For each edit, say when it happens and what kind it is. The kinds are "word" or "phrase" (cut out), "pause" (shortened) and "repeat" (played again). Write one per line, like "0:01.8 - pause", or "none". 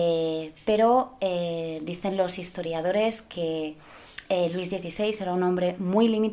none